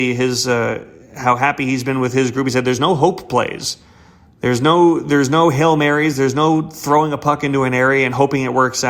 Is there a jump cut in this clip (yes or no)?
no